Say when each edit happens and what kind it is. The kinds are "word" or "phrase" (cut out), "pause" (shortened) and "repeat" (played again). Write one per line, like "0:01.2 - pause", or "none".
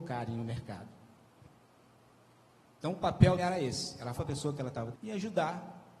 0:03.4 - word
0:04.2 - word
0:04.9 - word